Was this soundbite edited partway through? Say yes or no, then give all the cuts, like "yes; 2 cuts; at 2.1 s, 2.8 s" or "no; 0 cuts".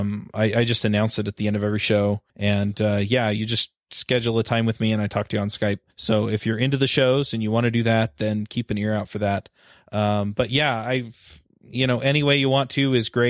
yes; 2 cuts; at 2.3 s, 5.9 s